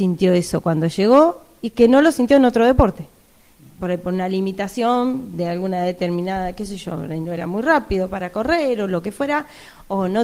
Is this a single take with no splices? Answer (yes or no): yes